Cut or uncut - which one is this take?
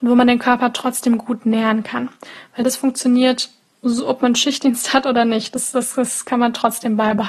uncut